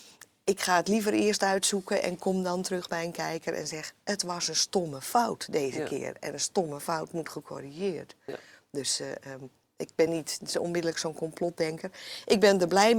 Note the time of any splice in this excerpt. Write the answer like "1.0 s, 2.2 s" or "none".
none